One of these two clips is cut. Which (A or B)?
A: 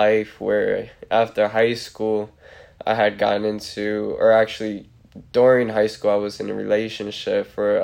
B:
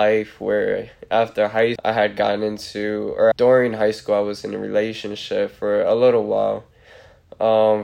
B